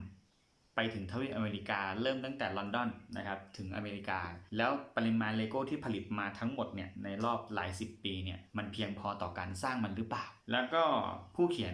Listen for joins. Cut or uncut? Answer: cut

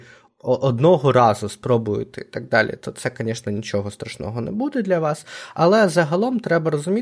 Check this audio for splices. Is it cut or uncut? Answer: uncut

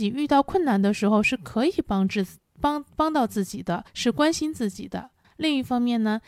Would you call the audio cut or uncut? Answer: cut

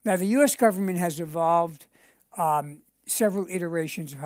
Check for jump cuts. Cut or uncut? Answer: uncut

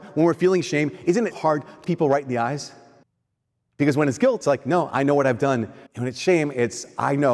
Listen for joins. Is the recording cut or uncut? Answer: cut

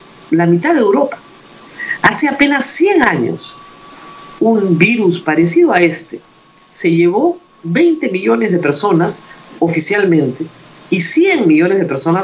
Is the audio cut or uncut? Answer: uncut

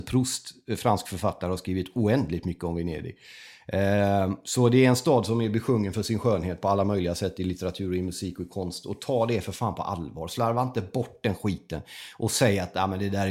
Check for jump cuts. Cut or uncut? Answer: uncut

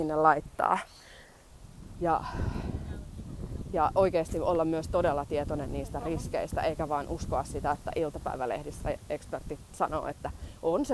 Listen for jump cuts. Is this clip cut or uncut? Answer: uncut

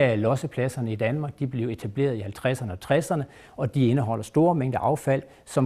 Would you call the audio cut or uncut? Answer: uncut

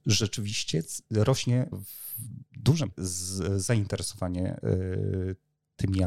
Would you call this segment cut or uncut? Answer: cut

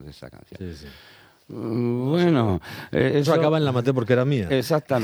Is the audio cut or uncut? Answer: uncut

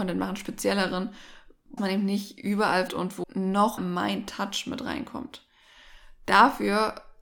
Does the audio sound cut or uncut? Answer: cut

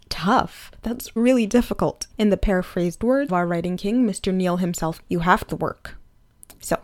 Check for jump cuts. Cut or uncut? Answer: cut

